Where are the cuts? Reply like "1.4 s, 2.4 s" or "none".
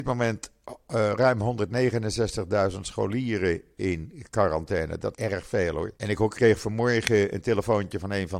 5.1 s, 6.0 s